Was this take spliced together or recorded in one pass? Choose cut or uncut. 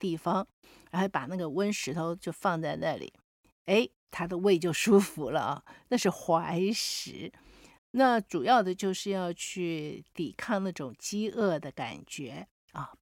cut